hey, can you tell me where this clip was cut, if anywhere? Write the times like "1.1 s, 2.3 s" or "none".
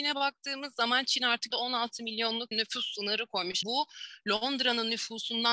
1.5 s, 2.5 s, 3.6 s